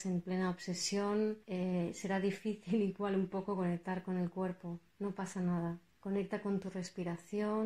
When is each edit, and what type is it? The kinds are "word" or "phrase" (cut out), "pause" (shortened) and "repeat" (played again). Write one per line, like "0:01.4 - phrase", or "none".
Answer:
0:01.4 - pause
0:05.9 - pause